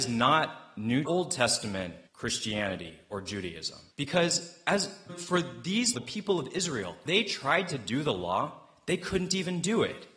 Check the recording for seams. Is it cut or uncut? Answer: cut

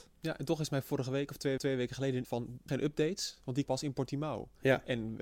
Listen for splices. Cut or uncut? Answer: cut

